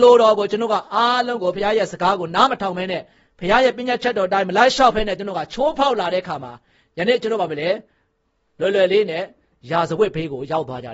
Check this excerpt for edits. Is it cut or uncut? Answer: uncut